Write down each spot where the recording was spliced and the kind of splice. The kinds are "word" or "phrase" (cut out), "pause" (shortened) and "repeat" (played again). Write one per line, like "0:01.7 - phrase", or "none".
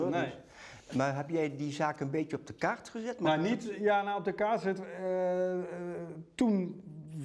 none